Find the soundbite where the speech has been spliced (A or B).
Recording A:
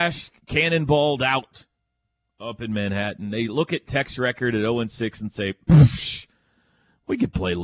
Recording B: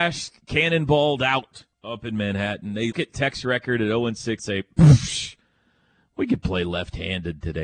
B